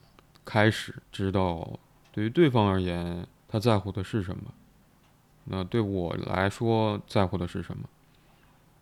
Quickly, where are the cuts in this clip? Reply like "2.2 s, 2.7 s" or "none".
1.0 s, 2.0 s, 3.4 s